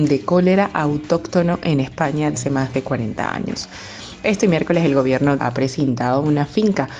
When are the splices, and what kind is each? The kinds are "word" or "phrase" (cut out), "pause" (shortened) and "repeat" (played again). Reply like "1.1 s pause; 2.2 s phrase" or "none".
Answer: 2.3 s word; 5.4 s phrase